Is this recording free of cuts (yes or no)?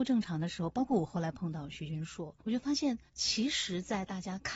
no